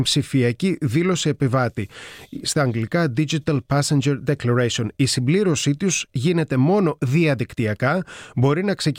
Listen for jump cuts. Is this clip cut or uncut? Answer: uncut